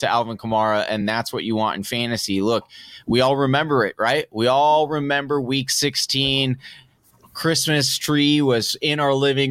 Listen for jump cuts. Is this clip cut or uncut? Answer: uncut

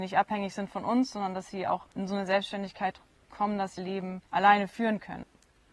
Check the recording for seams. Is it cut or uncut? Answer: cut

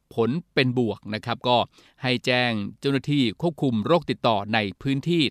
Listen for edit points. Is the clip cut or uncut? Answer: uncut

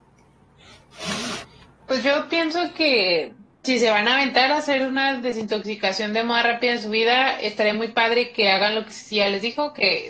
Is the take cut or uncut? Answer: uncut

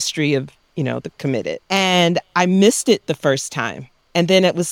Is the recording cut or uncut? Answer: cut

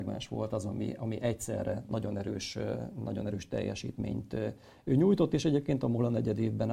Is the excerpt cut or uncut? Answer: uncut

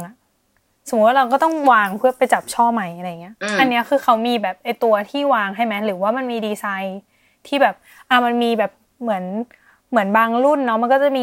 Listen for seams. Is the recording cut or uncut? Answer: uncut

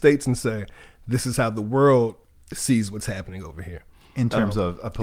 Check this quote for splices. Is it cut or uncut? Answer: uncut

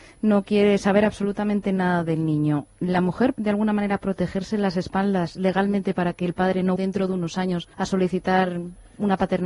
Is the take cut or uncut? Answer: cut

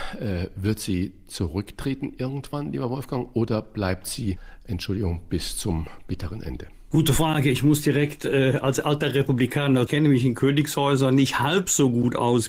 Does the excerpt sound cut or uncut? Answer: cut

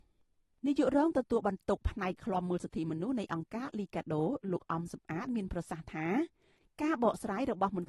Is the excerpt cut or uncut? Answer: uncut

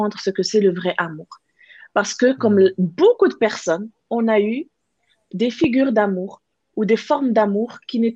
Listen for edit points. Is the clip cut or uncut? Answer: uncut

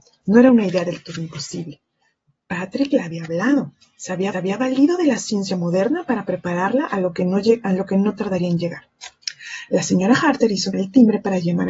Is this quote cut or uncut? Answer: cut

